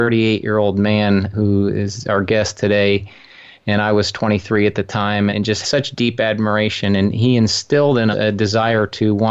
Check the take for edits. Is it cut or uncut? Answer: cut